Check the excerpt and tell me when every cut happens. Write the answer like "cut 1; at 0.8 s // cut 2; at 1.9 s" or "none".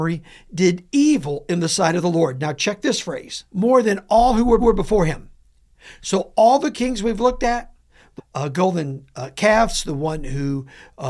cut 1; at 3.5 s // cut 2; at 4.6 s // cut 3; at 8.2 s